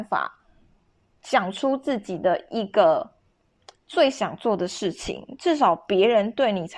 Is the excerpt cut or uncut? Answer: uncut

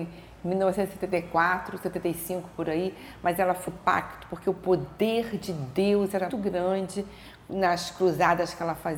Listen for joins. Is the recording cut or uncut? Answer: cut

